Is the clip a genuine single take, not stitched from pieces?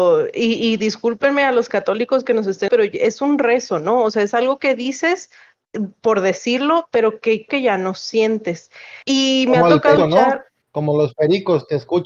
no; 5 cuts; at 2.7 s, 7.5 s, 9.0 s, 10.0 s, 10.6 s

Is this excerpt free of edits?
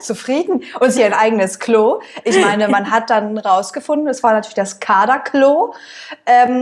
no; 1 cut; at 1.0 s

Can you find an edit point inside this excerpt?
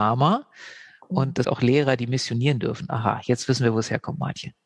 yes; 1 cut; at 1.4 s

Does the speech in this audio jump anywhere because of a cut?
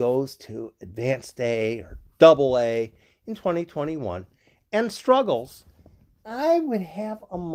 no; 0 cuts

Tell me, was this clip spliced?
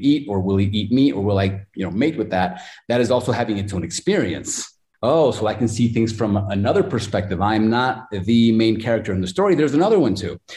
no; 0 cuts

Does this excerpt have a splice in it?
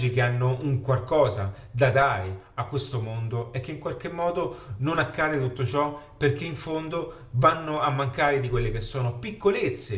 no; 0 cuts

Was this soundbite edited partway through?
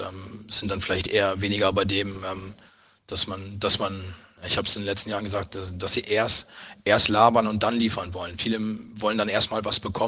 no; 0 cuts

